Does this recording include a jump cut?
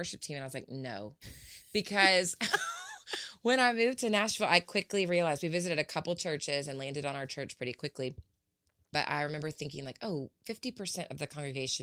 no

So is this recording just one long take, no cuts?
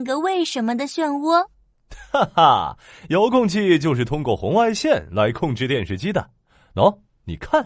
yes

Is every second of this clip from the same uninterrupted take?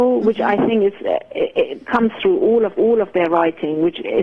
no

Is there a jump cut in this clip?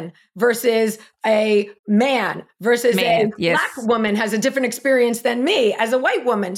yes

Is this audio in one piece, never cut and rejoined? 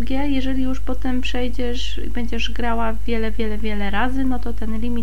yes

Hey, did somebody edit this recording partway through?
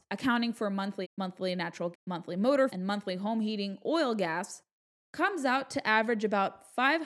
yes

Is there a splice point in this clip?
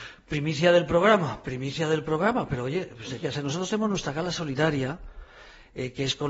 yes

